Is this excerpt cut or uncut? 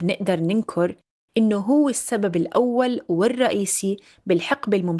uncut